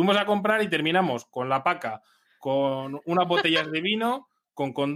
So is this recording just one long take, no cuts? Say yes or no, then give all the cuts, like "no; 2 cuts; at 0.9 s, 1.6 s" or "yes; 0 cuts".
yes; 0 cuts